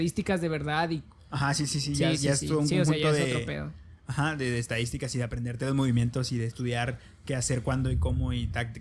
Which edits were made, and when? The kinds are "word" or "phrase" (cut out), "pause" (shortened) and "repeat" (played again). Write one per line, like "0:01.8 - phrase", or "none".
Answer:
none